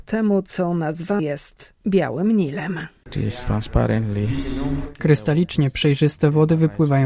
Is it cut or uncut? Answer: cut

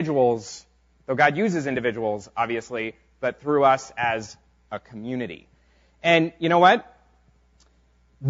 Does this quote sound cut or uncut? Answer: uncut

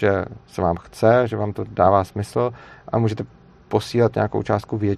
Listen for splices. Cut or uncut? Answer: uncut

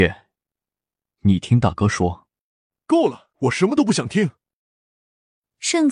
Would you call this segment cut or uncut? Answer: cut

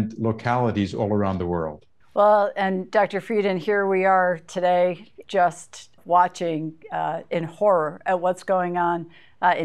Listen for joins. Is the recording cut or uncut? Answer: cut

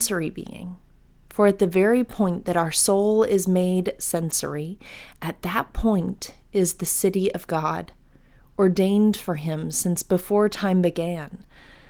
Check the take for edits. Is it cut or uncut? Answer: uncut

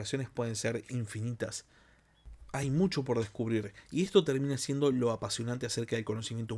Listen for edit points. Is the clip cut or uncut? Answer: uncut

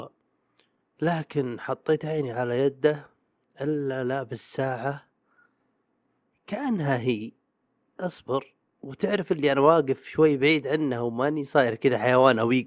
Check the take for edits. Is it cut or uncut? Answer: uncut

